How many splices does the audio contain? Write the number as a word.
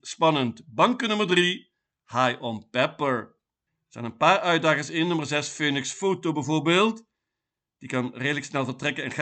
zero